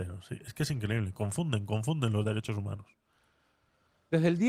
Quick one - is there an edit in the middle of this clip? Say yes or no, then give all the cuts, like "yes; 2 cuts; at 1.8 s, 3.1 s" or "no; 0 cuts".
no; 0 cuts